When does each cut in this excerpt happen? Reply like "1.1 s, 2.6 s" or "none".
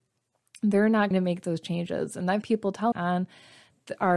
1.1 s, 2.4 s, 2.9 s